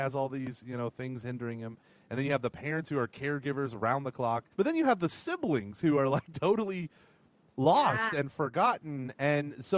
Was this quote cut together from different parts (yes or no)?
yes